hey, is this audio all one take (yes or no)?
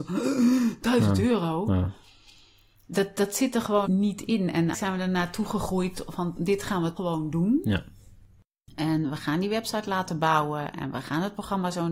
no